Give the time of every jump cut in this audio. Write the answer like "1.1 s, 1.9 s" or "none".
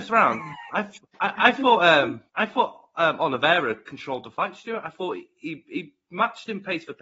1.1 s, 2.3 s